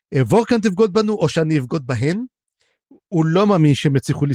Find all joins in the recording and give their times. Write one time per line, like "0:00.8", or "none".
none